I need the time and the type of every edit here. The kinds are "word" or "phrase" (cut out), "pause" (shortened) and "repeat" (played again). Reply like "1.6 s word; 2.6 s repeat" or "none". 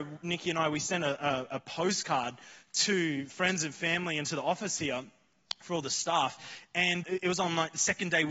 7.0 s word